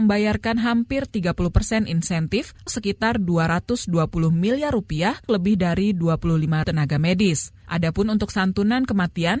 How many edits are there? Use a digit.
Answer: 3